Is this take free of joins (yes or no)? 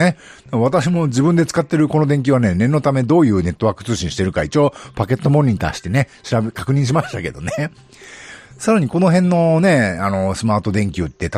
yes